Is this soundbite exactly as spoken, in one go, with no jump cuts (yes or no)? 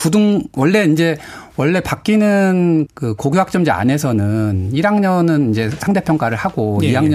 no